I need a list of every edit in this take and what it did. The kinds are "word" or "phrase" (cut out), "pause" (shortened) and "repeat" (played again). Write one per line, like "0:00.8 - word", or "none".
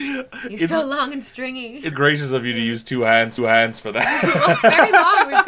0:01.9 - word
0:03.4 - repeat